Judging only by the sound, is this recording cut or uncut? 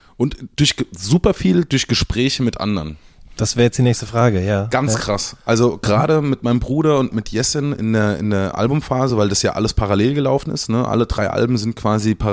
uncut